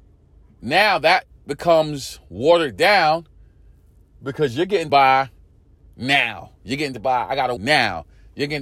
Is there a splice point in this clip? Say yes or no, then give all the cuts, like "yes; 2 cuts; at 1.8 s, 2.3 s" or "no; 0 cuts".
yes; 3 cuts; at 4.9 s, 6.9 s, 7.6 s